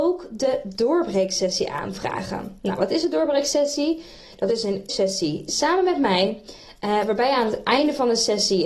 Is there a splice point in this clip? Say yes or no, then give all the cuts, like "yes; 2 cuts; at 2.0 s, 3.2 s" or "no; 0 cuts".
yes; 1 cut; at 4.9 s